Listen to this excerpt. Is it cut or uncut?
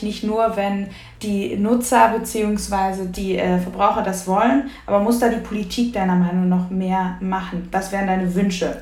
uncut